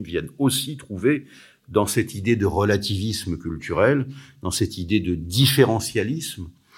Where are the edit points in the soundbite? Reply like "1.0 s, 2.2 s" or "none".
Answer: none